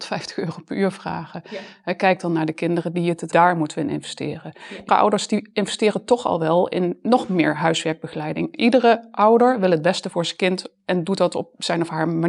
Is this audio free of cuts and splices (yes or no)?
no